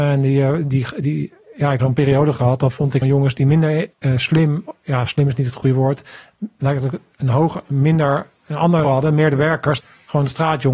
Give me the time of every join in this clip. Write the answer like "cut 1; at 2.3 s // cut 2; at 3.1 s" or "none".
cut 1; at 1.8 s // cut 2; at 3.0 s // cut 3; at 3.9 s // cut 4; at 8.8 s // cut 5; at 9.8 s

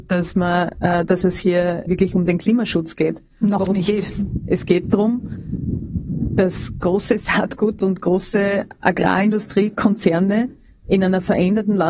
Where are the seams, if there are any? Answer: cut 1; at 1.9 s // cut 2; at 5.8 s

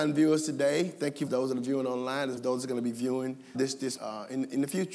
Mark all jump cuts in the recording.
cut 1; at 1.3 s // cut 2; at 2.4 s // cut 3; at 3.5 s // cut 4; at 4.0 s

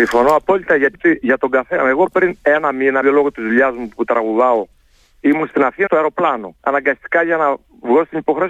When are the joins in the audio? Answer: cut 1; at 0.9 s // cut 2; at 3.0 s // cut 3; at 5.9 s // cut 4; at 6.6 s

